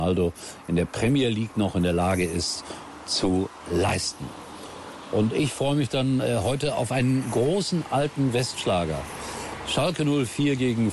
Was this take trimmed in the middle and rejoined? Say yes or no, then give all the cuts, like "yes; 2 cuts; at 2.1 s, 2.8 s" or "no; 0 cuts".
no; 0 cuts